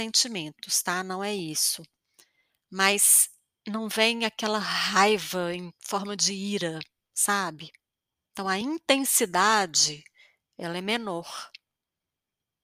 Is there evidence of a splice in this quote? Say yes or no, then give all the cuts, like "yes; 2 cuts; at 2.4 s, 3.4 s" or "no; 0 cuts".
no; 0 cuts